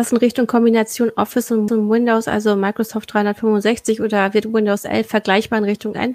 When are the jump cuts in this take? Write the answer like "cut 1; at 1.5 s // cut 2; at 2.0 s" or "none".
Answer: cut 1; at 1.7 s